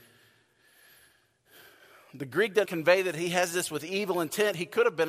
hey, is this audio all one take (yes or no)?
no